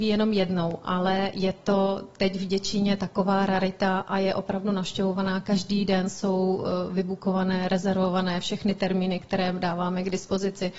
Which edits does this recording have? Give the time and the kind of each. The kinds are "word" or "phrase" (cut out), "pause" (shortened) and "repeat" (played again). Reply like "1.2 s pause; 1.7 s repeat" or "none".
none

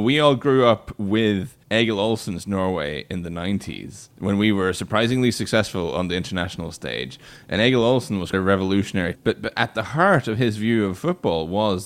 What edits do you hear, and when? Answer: 1.6 s pause; 4.1 s pause; 8.3 s word; 9.1 s word

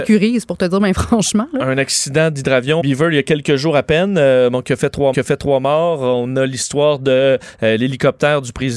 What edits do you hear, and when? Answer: 2.8 s word; 5.1 s repeat

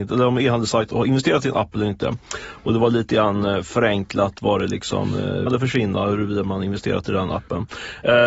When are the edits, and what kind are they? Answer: 0.9 s word; 5.5 s word

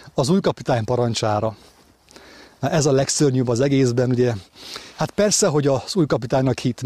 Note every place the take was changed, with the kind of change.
none

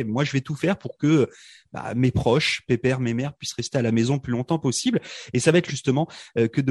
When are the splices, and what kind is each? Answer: 5.7 s word

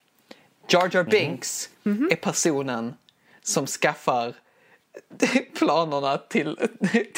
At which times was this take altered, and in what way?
1.7 s pause

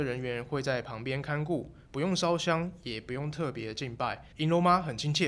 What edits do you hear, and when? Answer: 1.8 s pause; 4.3 s pause

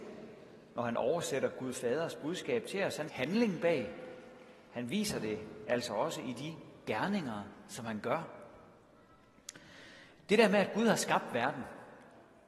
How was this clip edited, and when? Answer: 3.1 s word

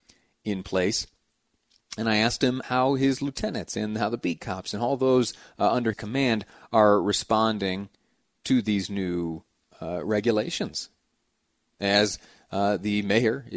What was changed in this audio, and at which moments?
2.6 s word; 5.9 s word

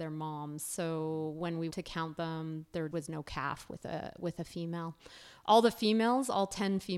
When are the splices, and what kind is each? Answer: 1.7 s word; 2.9 s word

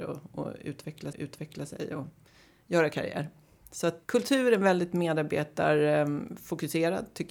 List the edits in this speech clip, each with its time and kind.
1.1 s repeat; 4.0 s word

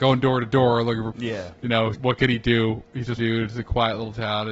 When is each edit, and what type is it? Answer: 1.1 s word; 1.9 s word; 3.2 s word

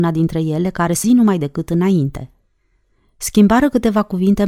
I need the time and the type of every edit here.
1.0 s word

